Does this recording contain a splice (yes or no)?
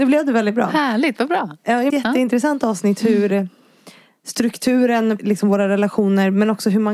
yes